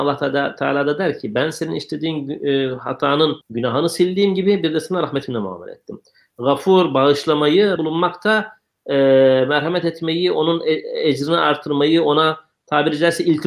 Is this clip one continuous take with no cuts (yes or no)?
no